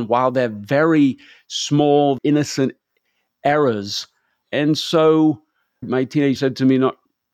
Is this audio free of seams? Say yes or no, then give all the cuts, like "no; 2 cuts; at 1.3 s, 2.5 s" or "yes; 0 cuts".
no; 3 cuts; at 2.2 s, 5.8 s, 6.4 s